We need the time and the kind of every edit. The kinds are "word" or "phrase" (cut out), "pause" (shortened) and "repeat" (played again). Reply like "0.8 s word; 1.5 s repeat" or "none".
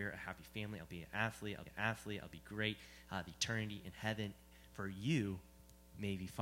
1.7 s repeat

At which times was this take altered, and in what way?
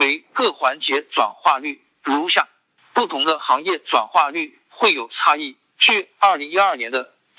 none

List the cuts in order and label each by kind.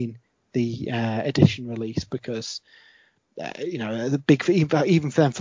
none

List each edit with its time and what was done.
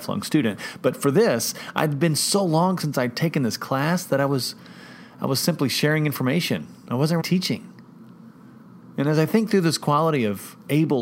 7.2 s word

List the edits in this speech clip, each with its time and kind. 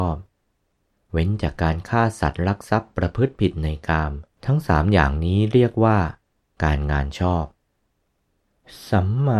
4.3 s pause

